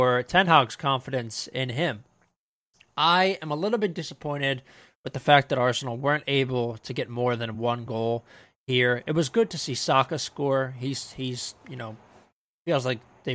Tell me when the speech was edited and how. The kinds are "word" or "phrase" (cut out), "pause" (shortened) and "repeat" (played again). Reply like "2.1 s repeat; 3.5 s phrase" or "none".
none